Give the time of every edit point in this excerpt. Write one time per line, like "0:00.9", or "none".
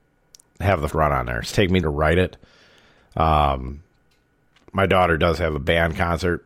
0:00.9
0:01.5
0:01.8